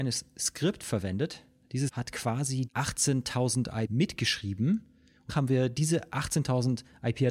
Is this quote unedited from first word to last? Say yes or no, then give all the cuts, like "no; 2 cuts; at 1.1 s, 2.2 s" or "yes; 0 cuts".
no; 4 cuts; at 1.9 s, 2.7 s, 3.9 s, 5.3 s